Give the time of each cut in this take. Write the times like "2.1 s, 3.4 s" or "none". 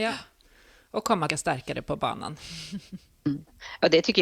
1.3 s